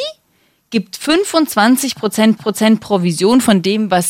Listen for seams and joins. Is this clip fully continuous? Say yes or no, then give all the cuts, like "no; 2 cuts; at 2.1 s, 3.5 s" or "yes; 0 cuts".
no; 1 cut; at 2.4 s